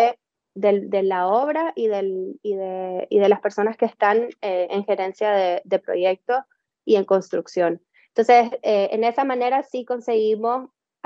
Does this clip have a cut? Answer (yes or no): no